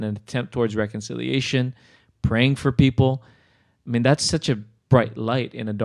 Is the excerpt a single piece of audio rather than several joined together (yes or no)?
yes